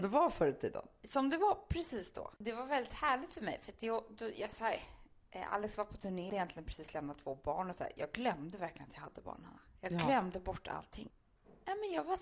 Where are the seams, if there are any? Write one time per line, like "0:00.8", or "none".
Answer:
0:02.4
0:06.3